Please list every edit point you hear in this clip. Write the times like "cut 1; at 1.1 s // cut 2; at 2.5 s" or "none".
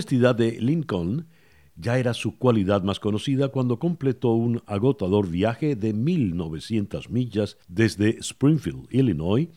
cut 1; at 7.6 s